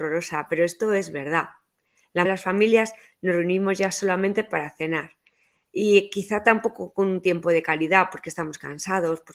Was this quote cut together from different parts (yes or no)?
yes